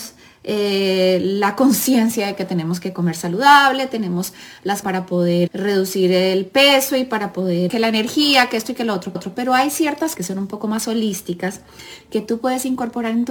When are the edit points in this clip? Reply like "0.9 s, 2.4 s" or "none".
4.8 s, 5.5 s, 7.7 s, 9.1 s, 10.1 s